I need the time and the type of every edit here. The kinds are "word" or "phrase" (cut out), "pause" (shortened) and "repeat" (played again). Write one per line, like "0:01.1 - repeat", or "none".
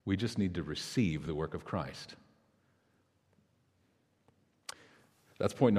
none